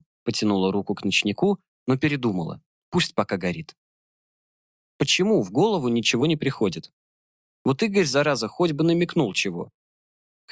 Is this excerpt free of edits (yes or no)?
yes